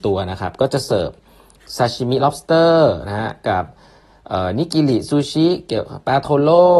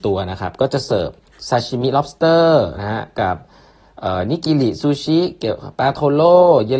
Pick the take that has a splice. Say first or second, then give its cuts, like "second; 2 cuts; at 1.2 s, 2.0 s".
second; 1 cut; at 1.3 s